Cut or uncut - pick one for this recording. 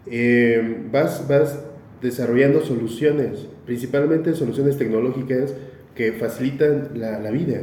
uncut